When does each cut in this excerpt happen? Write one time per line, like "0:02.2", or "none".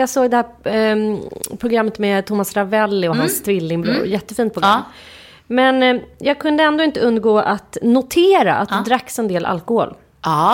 none